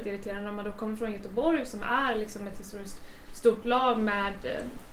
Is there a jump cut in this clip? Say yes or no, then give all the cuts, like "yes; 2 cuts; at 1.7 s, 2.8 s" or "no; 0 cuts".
no; 0 cuts